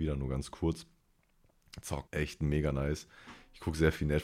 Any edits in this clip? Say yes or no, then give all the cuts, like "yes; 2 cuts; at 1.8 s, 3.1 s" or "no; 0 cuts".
yes; 1 cut; at 2.1 s